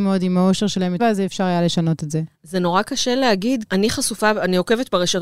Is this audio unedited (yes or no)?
no